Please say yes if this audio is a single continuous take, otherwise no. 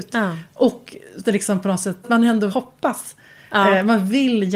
no